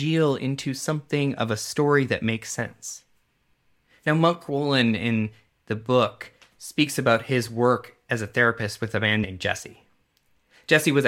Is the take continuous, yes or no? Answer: yes